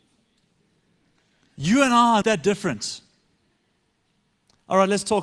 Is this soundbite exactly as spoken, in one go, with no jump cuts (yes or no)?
no